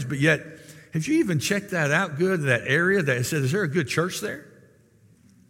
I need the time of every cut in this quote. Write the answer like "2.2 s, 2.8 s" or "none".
none